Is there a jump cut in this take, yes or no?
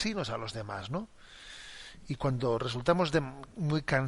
no